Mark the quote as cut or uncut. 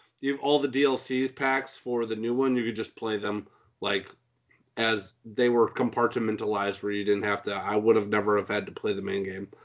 uncut